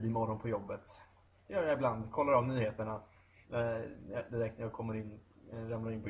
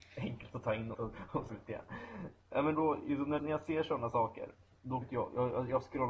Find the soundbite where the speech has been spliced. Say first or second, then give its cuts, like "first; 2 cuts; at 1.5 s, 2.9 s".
second; 5 cuts; at 0.9 s, 1.5 s, 2.8 s, 3.4 s, 5.0 s